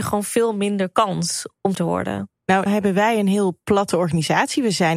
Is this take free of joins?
no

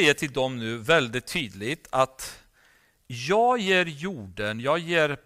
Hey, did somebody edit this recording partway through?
no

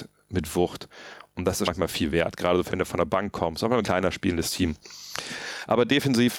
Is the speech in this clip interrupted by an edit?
yes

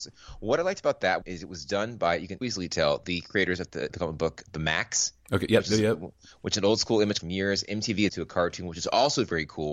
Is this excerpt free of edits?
no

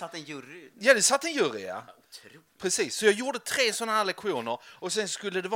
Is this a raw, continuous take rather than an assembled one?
yes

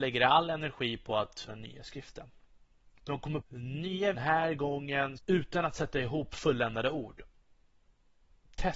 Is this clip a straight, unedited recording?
no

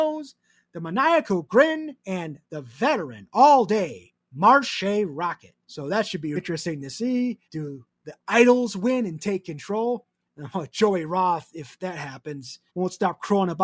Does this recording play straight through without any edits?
no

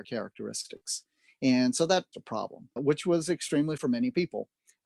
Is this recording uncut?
no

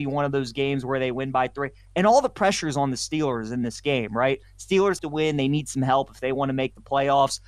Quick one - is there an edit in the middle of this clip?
yes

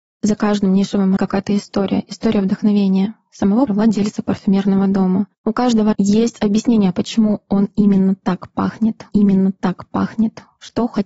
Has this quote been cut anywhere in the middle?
yes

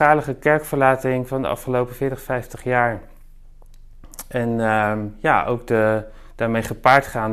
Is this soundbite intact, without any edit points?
yes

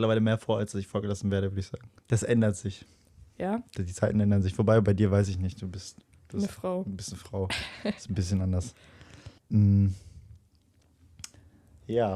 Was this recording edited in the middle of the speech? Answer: yes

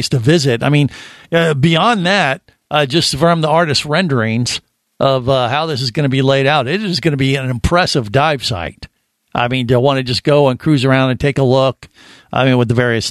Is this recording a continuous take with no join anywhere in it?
yes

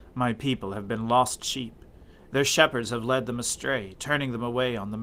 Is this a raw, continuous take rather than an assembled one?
yes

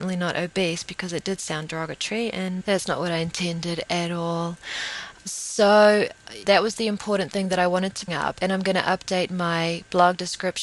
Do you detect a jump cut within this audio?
yes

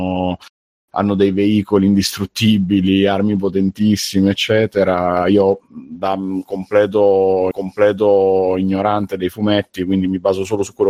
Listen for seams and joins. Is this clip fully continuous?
no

